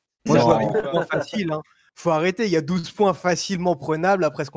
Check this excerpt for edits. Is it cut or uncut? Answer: uncut